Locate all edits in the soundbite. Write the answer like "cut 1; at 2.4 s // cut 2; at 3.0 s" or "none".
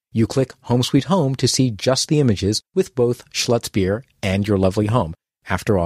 cut 1; at 2.7 s